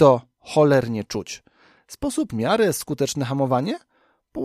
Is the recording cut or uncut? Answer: cut